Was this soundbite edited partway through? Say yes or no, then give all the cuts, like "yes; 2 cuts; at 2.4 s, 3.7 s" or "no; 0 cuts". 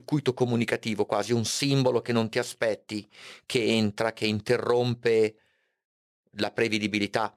no; 0 cuts